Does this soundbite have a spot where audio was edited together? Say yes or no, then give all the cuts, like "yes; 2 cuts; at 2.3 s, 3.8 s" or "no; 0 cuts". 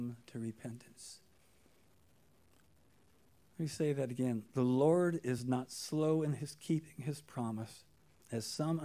no; 0 cuts